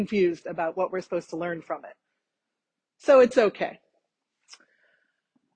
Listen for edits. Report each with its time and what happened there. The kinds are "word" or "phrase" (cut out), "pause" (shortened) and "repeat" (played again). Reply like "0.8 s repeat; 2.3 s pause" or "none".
none